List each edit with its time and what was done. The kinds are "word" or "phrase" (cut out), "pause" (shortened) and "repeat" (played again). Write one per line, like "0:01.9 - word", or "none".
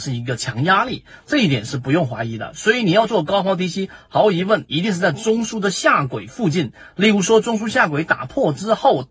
none